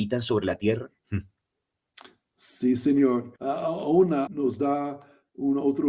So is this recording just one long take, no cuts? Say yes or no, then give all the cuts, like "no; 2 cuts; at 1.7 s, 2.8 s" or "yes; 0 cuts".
no; 3 cuts; at 1.0 s, 3.4 s, 4.3 s